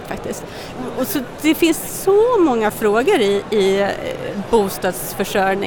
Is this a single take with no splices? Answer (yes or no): yes